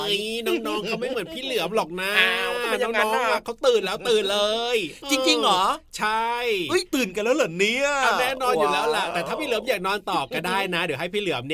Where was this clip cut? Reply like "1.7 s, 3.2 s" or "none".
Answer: 6.9 s

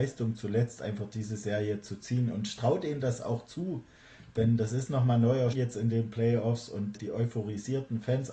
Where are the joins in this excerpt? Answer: 5.5 s, 6.9 s

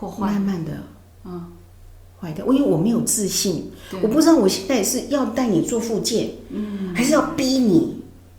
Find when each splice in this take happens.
none

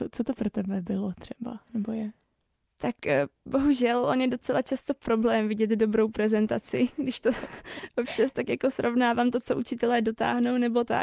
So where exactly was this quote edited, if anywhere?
none

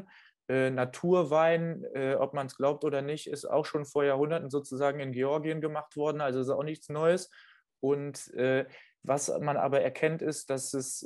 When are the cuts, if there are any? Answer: none

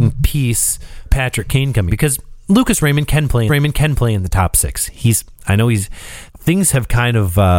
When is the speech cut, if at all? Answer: 1.0 s, 1.9 s, 3.5 s, 6.3 s

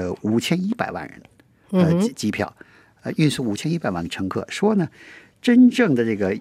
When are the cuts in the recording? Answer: none

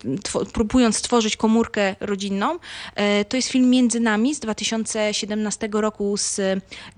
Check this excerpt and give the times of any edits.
none

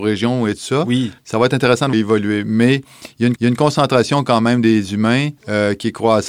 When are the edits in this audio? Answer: 1.2 s, 1.9 s, 3.4 s, 5.4 s

